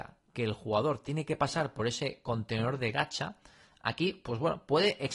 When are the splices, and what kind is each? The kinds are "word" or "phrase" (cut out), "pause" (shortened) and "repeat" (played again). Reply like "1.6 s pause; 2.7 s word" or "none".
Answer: none